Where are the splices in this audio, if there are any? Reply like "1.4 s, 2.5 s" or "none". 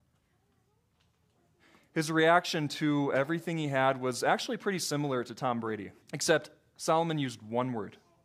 6.0 s